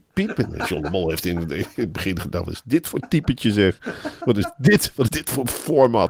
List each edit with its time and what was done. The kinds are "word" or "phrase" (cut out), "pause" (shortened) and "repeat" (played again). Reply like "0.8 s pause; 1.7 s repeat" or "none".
5.1 s word